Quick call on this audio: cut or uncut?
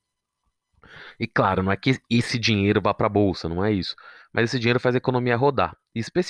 uncut